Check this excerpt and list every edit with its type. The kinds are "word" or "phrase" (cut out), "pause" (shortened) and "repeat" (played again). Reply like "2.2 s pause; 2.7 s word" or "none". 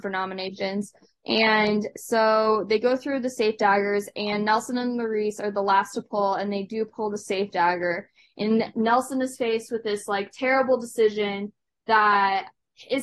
none